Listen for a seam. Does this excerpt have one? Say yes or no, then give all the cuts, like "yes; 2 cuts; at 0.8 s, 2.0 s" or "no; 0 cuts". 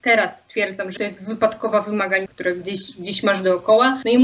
yes; 2 cuts; at 1.0 s, 2.3 s